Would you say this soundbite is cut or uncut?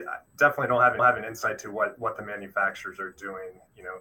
cut